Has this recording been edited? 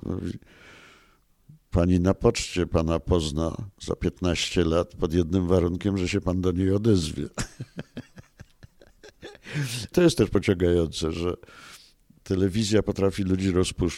yes; 1 cut; at 9.9 s

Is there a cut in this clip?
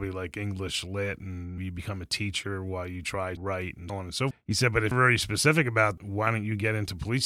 yes; 6 cuts; at 1.6 s, 3.4 s, 3.9 s, 4.3 s, 4.9 s, 6.0 s

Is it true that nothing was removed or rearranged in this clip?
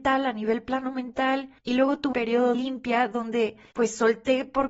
no; 3 cuts; at 1.6 s, 2.1 s, 2.5 s

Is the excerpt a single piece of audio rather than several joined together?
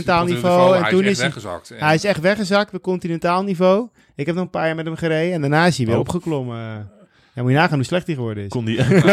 yes; 0 cuts

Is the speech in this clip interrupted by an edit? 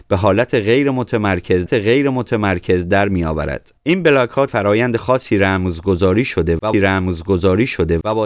yes; 4 cuts; at 1.7 s, 3.8 s, 4.5 s, 6.7 s

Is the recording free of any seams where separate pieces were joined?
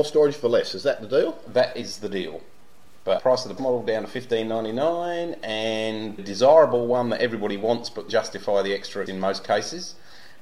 no; 5 cuts; at 3.2 s, 3.6 s, 6.2 s, 8.1 s, 9.1 s

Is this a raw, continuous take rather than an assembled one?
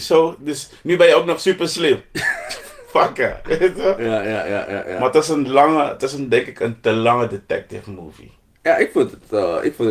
yes; 0 cuts

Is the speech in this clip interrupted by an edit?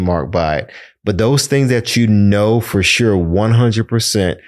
no; 0 cuts

